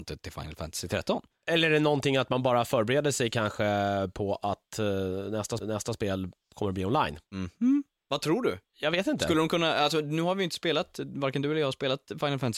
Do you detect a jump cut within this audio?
yes; 2 cuts; at 5.6 s, 7.3 s

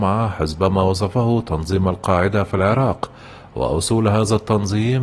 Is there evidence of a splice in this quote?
no; 0 cuts

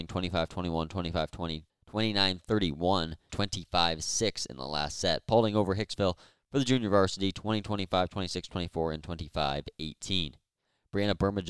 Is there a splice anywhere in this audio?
no; 0 cuts

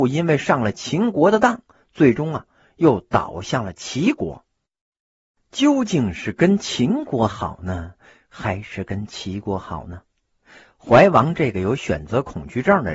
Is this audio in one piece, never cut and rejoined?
yes; 0 cuts

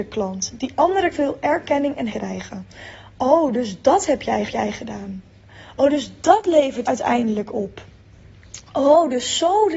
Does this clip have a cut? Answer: yes; 4 cuts; at 1.1 s, 2.1 s, 4.5 s, 6.8 s

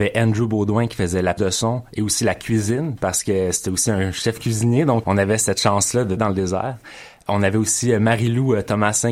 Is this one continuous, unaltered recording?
no; 3 cuts; at 1.4 s, 5.0 s, 6.2 s

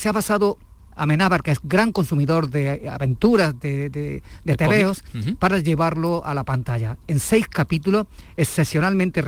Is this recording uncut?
yes; 0 cuts

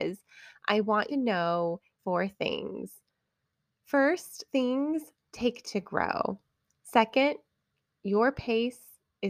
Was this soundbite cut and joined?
yes; 5 cuts; at 1.1 s, 2.0 s, 4.5 s, 5.6 s, 6.6 s

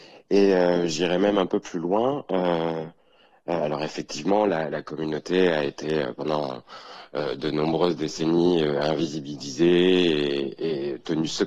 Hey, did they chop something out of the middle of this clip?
no; 0 cuts

